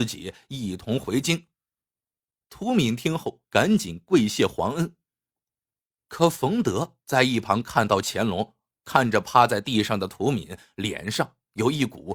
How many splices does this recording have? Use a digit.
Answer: 2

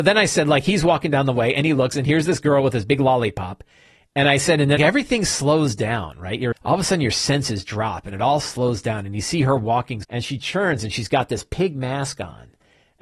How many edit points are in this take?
3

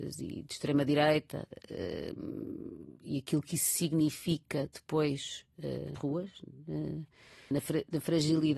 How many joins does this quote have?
2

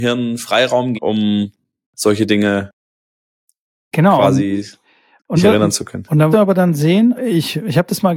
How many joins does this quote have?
5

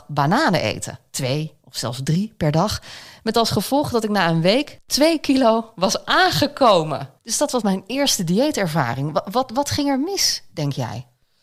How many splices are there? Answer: 1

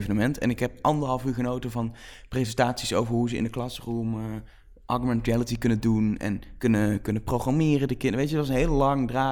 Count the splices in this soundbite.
0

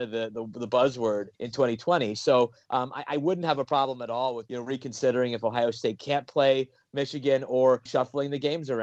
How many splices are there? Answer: 3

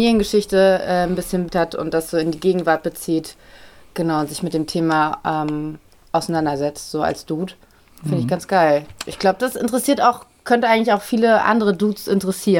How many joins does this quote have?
1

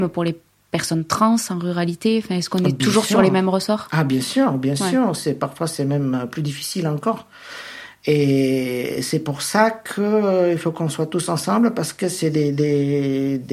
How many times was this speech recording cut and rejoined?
0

